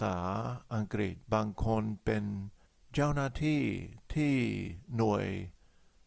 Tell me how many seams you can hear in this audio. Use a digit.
2